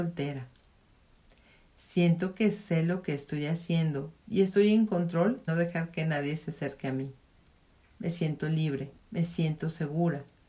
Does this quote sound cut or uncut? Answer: cut